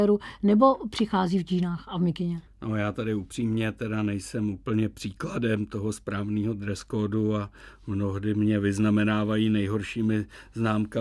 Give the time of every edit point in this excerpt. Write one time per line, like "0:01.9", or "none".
0:02.5